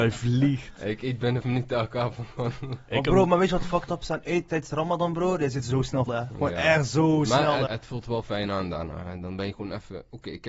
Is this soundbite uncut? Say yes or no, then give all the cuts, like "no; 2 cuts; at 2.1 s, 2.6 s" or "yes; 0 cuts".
no; 3 cuts; at 1.4 s, 6.1 s, 7.7 s